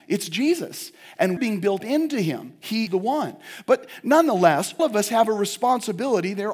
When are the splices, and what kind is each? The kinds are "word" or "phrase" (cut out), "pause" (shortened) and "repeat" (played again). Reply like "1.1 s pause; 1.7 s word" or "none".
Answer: 1.4 s word; 1.8 s word; 2.9 s word; 4.8 s word